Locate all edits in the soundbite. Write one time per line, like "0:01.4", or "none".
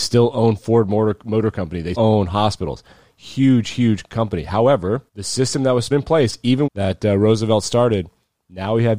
0:01.9
0:05.1
0:05.9
0:06.7